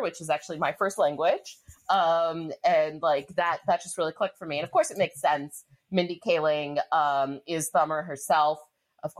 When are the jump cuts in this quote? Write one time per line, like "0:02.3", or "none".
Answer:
none

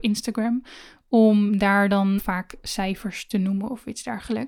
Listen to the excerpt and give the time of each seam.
0:02.2

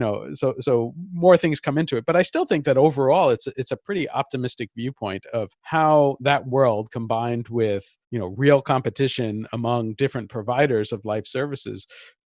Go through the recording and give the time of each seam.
0:05.6
0:08.0

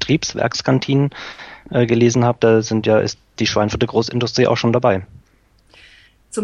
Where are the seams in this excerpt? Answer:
none

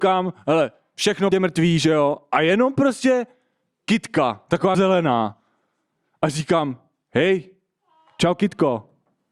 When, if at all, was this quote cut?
0:01.3
0:04.7

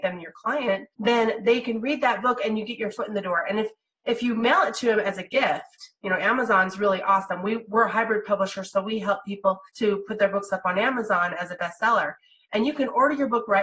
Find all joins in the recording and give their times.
0:00.9
0:09.7

